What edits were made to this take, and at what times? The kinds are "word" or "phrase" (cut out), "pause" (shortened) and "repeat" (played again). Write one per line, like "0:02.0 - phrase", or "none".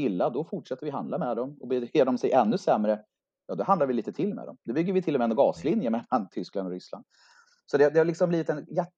none